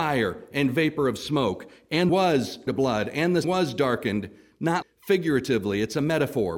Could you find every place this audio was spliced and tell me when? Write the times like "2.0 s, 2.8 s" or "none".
2.1 s, 2.7 s, 3.4 s, 4.8 s